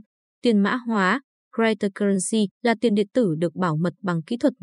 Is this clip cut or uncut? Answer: cut